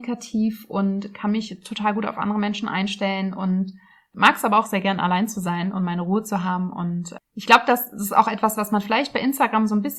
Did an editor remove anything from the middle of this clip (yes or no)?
yes